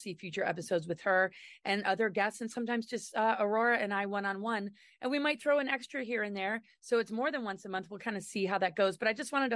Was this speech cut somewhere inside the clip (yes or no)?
no